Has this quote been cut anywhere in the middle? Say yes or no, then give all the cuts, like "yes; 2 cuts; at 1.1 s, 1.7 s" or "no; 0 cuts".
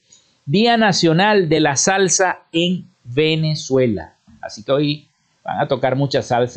no; 0 cuts